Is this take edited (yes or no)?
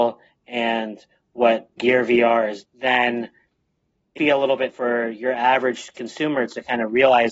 yes